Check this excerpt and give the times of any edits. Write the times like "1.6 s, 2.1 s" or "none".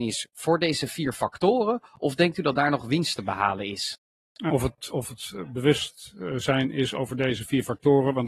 none